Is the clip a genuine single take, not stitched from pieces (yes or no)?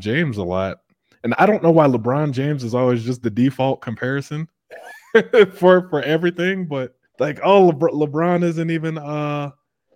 no